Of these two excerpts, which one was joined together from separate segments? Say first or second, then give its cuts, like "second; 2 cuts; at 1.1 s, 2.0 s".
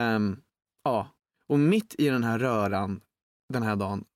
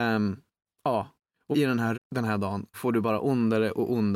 second; 3 cuts; at 1.5 s, 1.9 s, 2.7 s